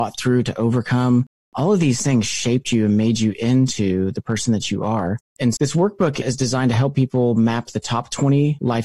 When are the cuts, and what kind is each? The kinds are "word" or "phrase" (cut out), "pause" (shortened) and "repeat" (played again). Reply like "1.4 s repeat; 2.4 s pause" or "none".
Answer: 5.6 s word